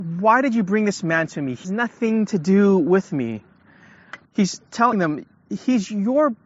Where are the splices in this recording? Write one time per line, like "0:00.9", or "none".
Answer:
0:01.6
0:04.2
0:04.9